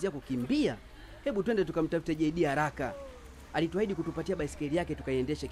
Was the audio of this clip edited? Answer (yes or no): no